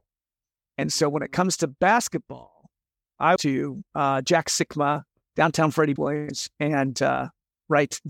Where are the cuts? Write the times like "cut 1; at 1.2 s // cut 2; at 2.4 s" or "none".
cut 1; at 3.4 s // cut 2; at 6.0 s